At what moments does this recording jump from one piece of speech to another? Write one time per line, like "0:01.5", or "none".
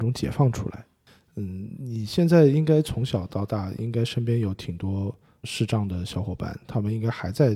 0:05.4